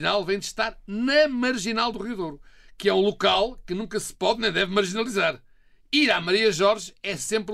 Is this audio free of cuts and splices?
yes; 0 cuts

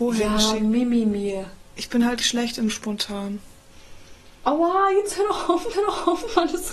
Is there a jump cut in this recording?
yes; 2 cuts; at 2.2 s, 5.7 s

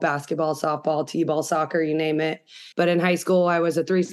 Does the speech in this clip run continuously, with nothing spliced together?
no; 1 cut; at 2.7 s

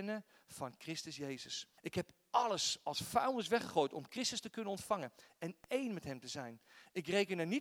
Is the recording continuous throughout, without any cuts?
no; 1 cut; at 1.8 s

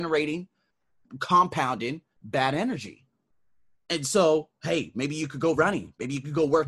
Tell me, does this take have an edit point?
no; 0 cuts

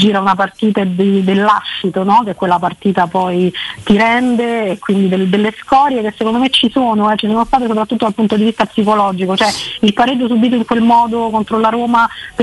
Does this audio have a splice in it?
no; 0 cuts

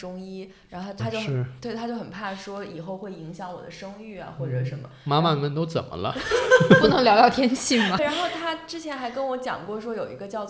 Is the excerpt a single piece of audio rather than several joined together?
no; 2 cuts; at 1.0 s, 8.0 s

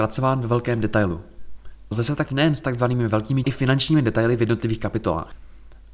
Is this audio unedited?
no; 3 cuts; at 1.9 s, 2.3 s, 3.4 s

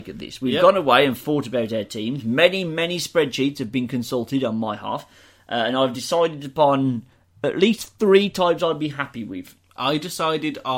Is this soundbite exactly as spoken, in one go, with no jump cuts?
yes; 0 cuts

